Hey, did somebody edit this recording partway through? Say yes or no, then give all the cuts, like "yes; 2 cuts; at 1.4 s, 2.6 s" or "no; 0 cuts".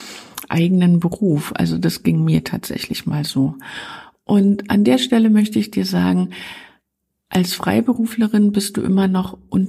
no; 0 cuts